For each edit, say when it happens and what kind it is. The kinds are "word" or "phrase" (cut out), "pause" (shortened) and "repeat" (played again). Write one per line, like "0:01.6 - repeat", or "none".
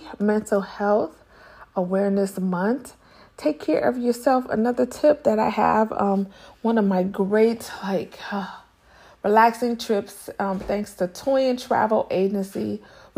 none